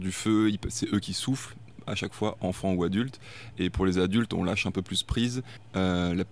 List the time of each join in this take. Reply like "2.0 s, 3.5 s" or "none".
none